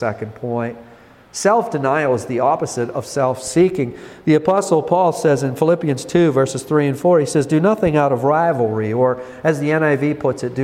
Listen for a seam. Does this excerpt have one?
no; 0 cuts

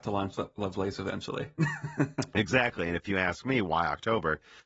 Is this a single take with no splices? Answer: yes; 0 cuts

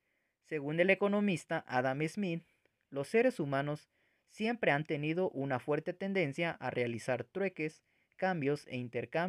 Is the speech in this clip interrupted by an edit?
no; 0 cuts

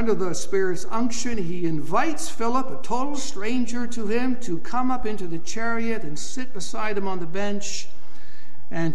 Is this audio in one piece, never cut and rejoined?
yes; 0 cuts

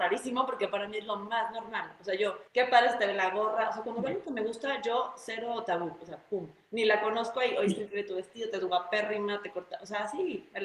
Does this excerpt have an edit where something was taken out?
yes; 1 cut; at 2.5 s

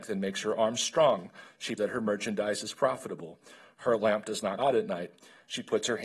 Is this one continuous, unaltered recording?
no; 2 cuts; at 1.8 s, 4.6 s

